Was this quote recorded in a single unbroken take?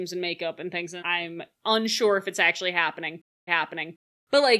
no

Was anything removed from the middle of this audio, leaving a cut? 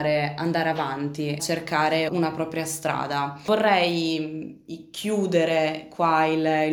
yes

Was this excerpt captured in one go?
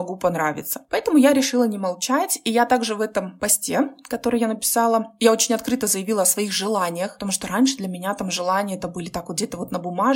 yes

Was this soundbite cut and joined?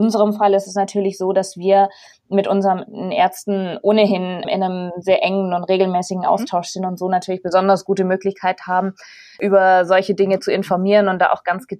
yes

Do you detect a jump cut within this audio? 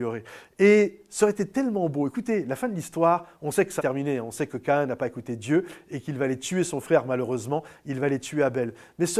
yes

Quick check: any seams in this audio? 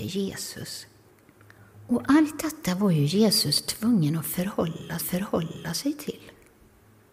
yes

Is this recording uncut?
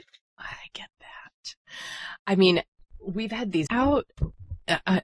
no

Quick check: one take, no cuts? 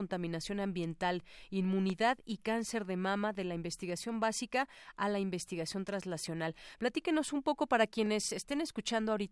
yes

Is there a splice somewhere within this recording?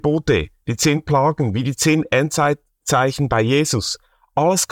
no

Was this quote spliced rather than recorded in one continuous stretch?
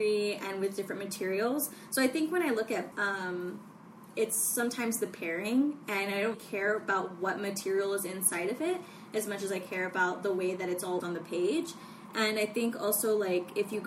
yes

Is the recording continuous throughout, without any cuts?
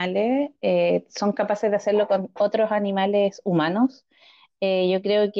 yes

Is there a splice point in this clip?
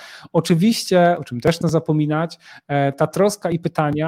yes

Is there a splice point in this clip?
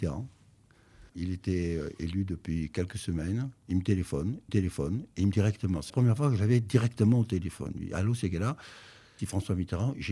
yes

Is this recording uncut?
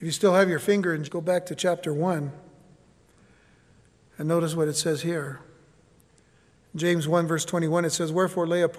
no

